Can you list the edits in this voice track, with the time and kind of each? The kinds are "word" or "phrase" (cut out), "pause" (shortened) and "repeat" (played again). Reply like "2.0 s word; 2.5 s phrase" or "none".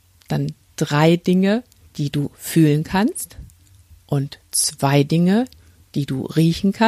1.9 s pause; 3.6 s pause